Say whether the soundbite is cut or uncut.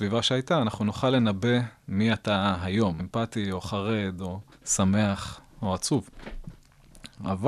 cut